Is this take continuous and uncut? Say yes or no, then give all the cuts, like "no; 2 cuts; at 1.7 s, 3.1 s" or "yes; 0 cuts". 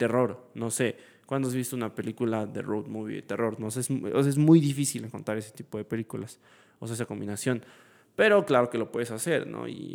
yes; 0 cuts